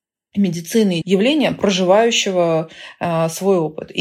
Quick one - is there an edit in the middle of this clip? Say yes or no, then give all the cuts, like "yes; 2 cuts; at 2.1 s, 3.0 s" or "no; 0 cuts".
yes; 1 cut; at 1.0 s